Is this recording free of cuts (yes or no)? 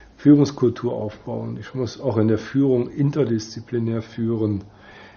yes